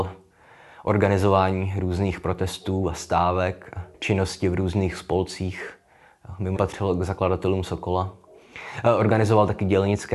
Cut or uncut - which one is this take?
cut